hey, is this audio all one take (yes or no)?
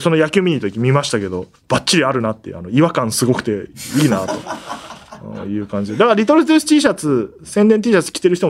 no